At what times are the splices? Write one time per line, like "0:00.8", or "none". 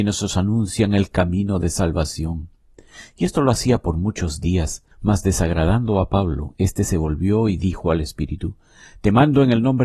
0:04.9